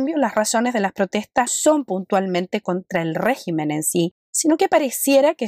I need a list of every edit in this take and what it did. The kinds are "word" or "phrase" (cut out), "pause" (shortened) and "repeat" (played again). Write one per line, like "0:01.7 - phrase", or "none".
0:01.5 - word
0:04.2 - pause